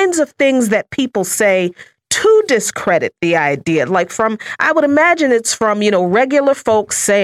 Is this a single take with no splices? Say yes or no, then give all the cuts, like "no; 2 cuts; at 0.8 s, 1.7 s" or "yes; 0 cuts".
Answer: yes; 0 cuts